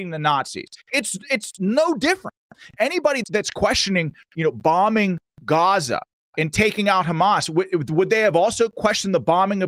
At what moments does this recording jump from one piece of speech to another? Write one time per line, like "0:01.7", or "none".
0:03.2